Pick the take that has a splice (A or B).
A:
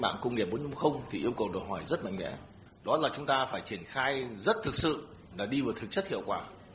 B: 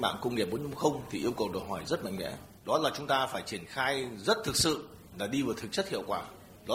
B